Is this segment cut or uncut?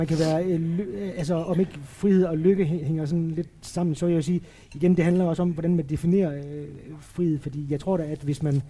uncut